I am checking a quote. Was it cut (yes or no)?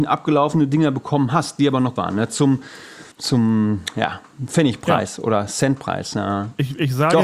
yes